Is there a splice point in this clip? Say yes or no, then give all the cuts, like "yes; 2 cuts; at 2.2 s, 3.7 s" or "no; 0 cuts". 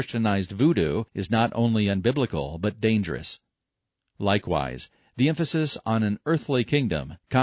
yes; 1 cut; at 1.1 s